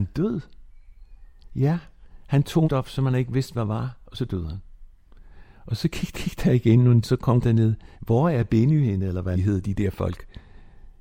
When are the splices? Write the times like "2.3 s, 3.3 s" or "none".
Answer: 2.6 s, 6.1 s, 7.0 s, 7.4 s, 7.9 s, 9.3 s